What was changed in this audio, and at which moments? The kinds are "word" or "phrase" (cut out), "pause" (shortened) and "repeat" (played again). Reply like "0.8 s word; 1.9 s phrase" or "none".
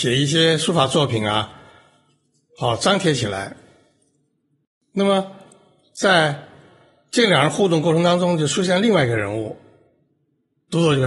none